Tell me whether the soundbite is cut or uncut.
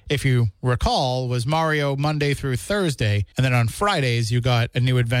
cut